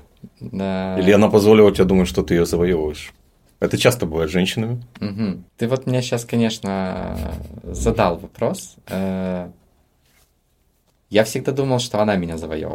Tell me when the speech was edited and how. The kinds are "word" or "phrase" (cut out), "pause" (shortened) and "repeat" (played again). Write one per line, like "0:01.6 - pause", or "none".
0:05.5 - pause